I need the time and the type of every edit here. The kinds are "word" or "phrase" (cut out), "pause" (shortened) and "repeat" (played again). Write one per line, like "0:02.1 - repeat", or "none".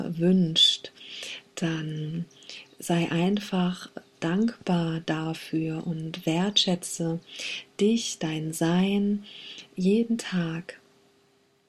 none